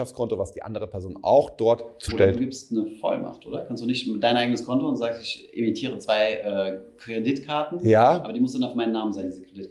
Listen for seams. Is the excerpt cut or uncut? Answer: cut